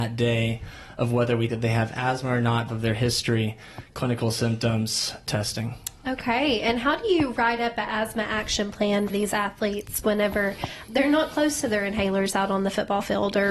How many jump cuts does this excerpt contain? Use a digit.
5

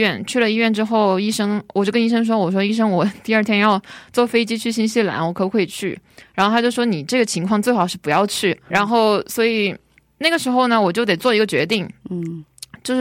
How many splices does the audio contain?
1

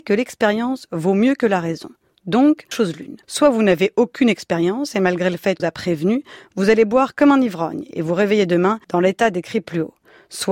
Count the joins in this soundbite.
4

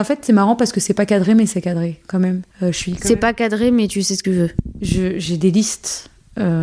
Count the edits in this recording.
2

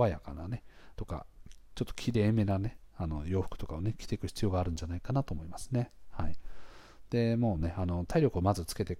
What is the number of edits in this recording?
1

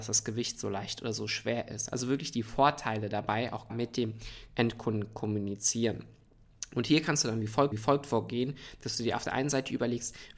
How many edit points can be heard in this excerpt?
2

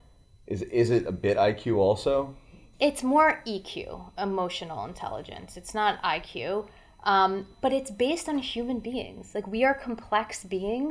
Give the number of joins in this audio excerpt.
0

